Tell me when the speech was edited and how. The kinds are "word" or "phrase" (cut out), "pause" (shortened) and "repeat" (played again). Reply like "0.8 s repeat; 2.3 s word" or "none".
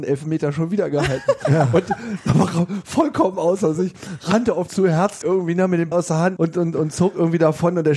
4.7 s word; 5.2 s word; 5.9 s word; 6.4 s word